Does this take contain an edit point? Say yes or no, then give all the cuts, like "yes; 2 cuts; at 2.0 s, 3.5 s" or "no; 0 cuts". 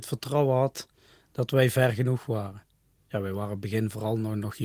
no; 0 cuts